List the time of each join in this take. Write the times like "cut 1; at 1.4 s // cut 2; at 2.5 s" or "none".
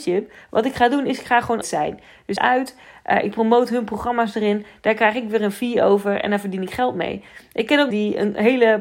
cut 1; at 1.6 s // cut 2; at 2.4 s // cut 3; at 7.9 s